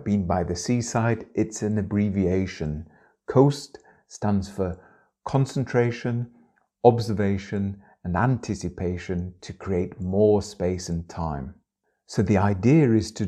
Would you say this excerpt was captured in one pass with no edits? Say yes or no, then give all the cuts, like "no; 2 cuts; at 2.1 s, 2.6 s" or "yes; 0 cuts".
yes; 0 cuts